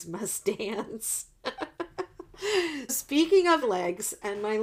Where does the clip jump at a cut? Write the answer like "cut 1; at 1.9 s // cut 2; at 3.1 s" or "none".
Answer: cut 1; at 2.9 s // cut 2; at 3.6 s